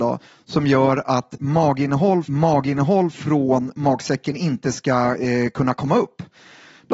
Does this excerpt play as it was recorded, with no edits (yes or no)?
no